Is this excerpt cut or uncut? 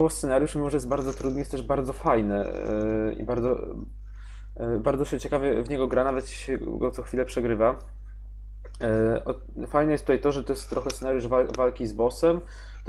uncut